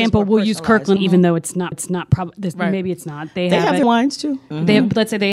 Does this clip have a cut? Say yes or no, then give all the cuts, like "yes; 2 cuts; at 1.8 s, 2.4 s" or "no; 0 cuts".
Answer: yes; 3 cuts; at 1.0 s, 1.7 s, 3.8 s